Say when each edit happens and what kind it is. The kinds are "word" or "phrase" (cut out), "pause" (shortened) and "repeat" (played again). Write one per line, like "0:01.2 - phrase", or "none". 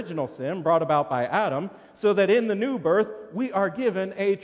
none